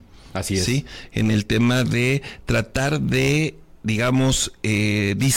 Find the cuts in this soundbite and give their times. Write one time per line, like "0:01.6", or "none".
none